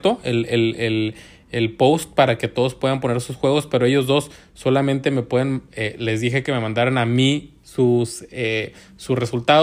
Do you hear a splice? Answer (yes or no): no